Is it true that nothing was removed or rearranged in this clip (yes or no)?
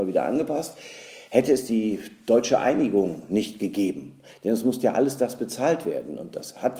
yes